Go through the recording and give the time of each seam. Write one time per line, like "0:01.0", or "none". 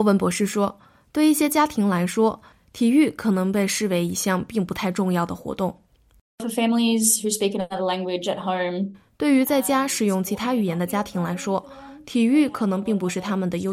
none